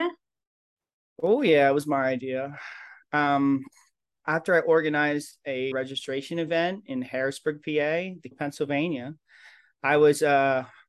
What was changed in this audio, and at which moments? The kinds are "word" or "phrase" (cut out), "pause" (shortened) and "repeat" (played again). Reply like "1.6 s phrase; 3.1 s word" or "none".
4.2 s word; 5.7 s phrase; 8.3 s word